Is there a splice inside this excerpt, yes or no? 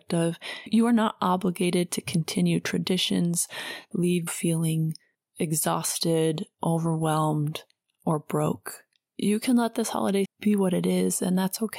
yes